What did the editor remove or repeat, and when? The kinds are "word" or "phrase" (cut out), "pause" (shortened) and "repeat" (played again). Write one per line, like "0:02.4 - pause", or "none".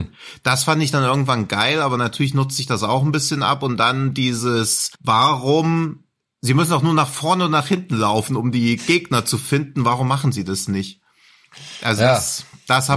0:05.0 - pause